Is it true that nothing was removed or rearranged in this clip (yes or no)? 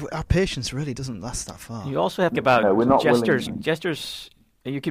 no